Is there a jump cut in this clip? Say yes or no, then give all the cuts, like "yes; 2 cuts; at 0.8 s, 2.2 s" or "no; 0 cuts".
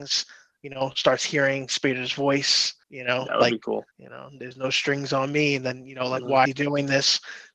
yes; 3 cuts; at 2.8 s, 3.9 s, 6.4 s